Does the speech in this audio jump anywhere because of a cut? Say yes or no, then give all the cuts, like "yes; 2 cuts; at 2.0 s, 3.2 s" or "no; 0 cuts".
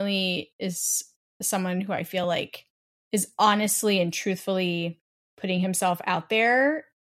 no; 0 cuts